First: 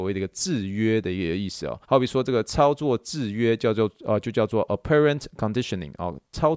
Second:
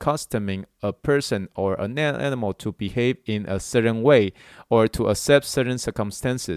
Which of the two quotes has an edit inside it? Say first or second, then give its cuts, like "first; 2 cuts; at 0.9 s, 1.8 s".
first; 1 cut; at 1.8 s